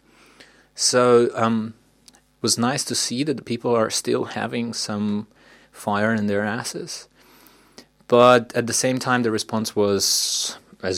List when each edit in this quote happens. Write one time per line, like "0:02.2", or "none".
none